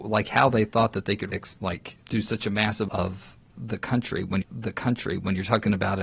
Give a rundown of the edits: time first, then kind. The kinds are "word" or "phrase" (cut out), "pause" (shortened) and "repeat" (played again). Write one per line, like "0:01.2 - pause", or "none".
0:01.3 - word
0:02.0 - pause
0:02.9 - word
0:04.4 - repeat